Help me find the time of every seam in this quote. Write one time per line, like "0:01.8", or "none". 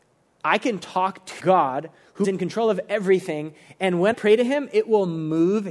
0:01.4
0:02.2
0:04.1